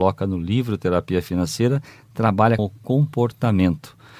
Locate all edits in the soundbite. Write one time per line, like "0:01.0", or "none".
0:02.6